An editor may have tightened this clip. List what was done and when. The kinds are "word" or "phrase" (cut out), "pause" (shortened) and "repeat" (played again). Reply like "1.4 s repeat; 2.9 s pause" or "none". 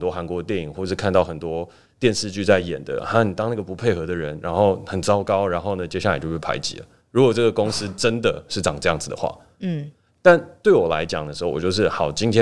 none